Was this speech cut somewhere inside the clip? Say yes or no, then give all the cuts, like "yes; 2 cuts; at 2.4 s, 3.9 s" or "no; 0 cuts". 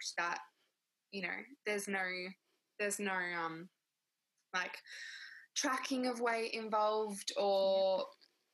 no; 0 cuts